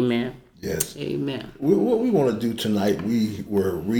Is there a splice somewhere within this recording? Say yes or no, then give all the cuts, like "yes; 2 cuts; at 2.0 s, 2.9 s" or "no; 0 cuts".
no; 0 cuts